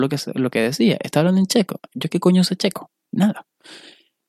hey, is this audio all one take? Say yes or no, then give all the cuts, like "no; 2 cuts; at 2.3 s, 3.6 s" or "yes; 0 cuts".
yes; 0 cuts